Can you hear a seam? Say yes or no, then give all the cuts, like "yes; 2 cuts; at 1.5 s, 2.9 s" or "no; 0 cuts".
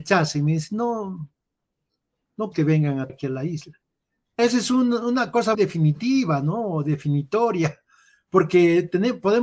yes; 4 cuts; at 2.5 s, 3.1 s, 4.4 s, 5.5 s